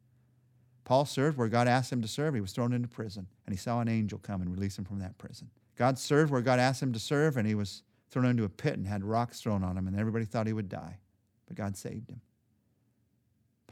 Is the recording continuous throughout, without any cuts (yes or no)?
no